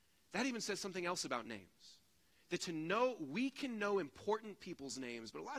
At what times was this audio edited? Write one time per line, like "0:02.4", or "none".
none